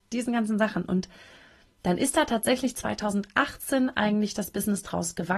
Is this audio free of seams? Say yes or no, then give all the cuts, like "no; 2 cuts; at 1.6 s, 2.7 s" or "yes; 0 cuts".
yes; 0 cuts